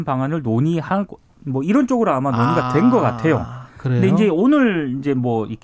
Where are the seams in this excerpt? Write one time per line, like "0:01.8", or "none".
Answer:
none